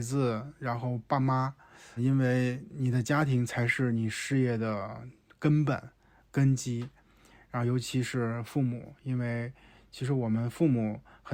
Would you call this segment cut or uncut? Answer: cut